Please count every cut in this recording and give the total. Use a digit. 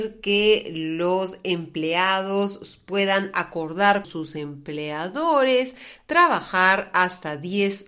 1